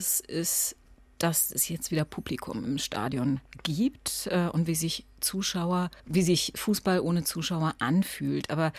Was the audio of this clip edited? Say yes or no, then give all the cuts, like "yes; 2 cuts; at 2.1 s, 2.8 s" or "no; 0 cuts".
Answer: yes; 1 cut; at 6.0 s